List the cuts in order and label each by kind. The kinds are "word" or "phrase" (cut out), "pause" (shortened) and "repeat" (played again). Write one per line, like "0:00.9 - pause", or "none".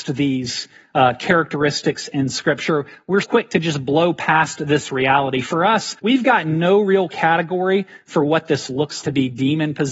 0:03.2 - word
0:06.0 - pause
0:09.0 - word

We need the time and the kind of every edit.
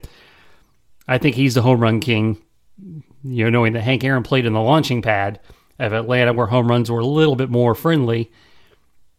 none

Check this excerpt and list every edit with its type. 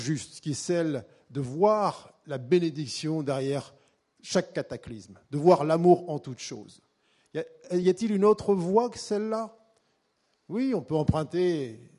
none

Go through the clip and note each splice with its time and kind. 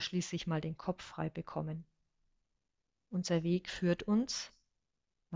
none

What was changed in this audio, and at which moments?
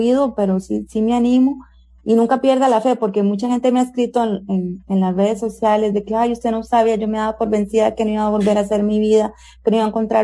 none

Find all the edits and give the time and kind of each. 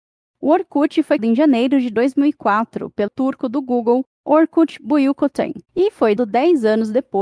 0:01.2 - word
0:03.1 - word
0:05.6 - pause
0:06.2 - word

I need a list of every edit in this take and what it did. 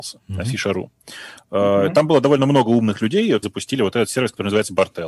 0:03.4 - phrase

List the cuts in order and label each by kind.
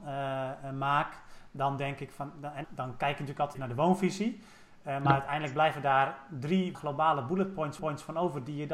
0:02.6 - word
0:03.5 - word
0:06.7 - phrase
0:07.8 - repeat

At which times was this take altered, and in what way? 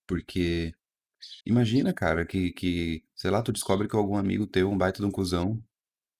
0:01.4 - pause

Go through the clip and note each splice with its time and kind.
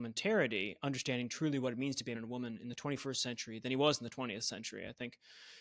0:02.1 - word

